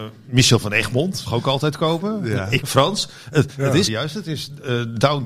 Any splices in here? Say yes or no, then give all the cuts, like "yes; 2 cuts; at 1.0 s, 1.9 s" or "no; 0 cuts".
yes; 3 cuts; at 1.3 s, 2.6 s, 3.9 s